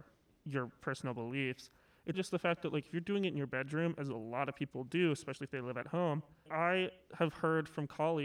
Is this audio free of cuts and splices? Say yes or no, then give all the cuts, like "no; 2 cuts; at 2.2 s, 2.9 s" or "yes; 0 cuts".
no; 2 cuts; at 2.1 s, 6.5 s